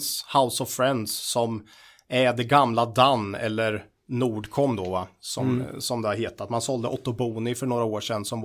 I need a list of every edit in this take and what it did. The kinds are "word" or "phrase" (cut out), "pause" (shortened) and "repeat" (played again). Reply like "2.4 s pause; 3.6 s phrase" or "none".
none